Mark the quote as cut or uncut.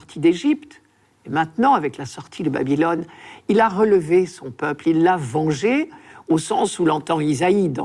uncut